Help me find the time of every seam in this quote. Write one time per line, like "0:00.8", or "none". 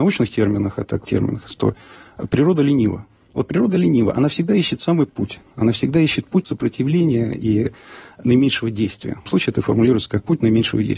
0:01.0
0:05.1
0:06.4
0:09.3